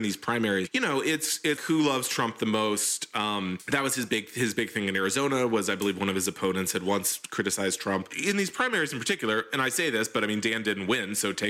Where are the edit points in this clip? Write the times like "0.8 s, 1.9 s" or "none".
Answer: 1.6 s